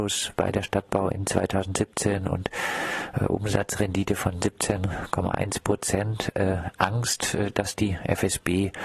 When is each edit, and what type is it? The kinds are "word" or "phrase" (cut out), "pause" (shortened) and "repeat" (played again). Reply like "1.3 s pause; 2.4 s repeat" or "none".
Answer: none